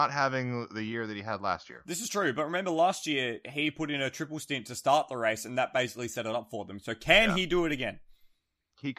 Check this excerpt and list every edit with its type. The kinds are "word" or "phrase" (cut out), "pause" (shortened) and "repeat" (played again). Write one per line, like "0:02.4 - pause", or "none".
none